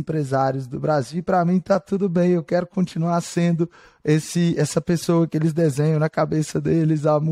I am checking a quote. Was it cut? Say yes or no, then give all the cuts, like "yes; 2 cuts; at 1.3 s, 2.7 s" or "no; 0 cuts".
no; 0 cuts